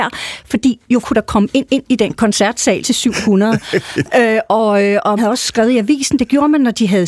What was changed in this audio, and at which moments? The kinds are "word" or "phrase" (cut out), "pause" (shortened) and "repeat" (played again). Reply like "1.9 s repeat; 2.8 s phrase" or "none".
1.0 s word; 1.7 s repeat; 2.8 s phrase; 5.2 s word